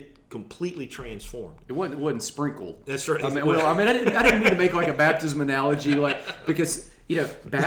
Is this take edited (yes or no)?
no